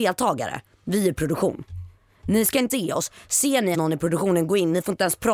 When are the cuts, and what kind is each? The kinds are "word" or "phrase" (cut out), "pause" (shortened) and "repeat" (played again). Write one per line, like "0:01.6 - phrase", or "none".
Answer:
0:02.7 - word
0:03.7 - word